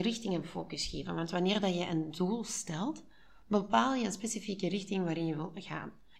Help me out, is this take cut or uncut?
uncut